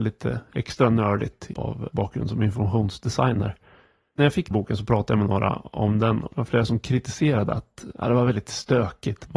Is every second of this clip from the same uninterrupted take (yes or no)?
no